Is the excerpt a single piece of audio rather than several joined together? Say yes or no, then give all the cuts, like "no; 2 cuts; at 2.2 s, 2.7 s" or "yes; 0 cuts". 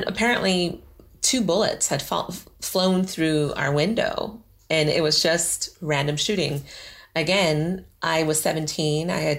yes; 0 cuts